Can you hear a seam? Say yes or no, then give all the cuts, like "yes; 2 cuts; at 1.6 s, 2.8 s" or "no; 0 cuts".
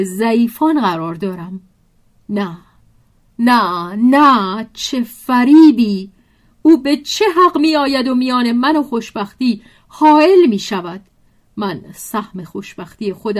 no; 0 cuts